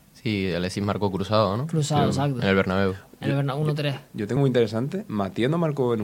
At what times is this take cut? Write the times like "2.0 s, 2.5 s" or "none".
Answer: 4.4 s